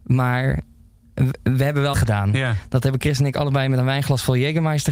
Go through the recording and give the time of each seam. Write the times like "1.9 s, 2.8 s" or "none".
1.9 s